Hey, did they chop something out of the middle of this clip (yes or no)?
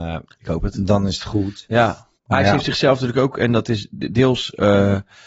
yes